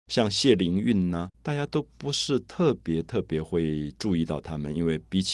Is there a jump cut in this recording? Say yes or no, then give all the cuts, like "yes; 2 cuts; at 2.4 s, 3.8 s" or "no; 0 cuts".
yes; 1 cut; at 1.3 s